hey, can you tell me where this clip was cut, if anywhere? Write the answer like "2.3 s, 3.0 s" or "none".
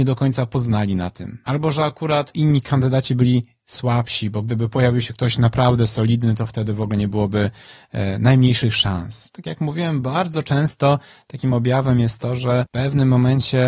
none